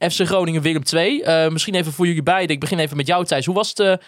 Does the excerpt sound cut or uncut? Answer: uncut